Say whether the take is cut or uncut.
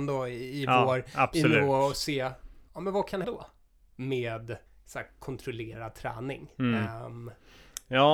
cut